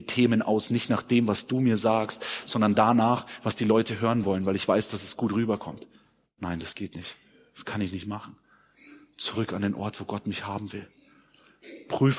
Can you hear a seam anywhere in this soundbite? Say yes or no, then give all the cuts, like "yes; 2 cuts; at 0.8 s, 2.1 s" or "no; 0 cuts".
no; 0 cuts